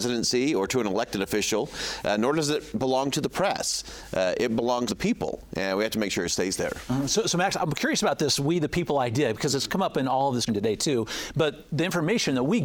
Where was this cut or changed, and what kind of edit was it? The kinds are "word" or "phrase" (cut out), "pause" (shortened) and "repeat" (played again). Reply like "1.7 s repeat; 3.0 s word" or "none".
4.9 s word; 10.5 s word